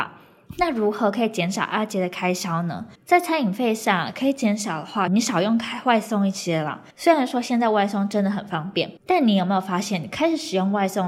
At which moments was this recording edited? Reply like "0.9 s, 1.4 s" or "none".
2.9 s, 5.1 s, 6.9 s, 9.0 s